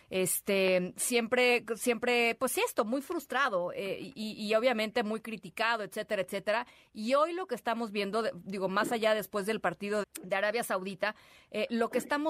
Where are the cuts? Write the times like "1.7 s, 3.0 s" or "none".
10.0 s